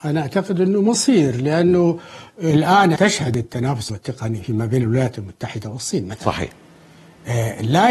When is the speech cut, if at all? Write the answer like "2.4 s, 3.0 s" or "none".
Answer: 3.0 s, 3.9 s